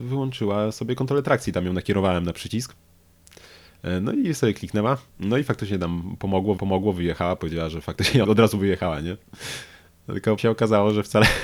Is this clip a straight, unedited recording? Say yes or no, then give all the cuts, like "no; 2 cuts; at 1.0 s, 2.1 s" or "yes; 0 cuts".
no; 4 cuts; at 5.1 s, 6.6 s, 8.2 s, 10.4 s